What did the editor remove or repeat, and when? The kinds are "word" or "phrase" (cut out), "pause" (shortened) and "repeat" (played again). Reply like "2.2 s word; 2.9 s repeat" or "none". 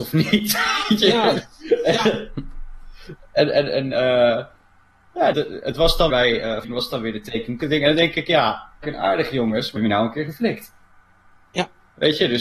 5.3 s word; 6.1 s word; 6.6 s word; 7.6 s word; 8.8 s phrase; 9.8 s phrase